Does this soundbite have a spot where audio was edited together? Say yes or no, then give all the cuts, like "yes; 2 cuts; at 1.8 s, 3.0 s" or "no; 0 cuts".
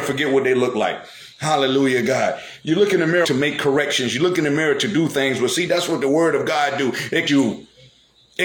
yes; 2 cuts; at 3.2 s, 7.3 s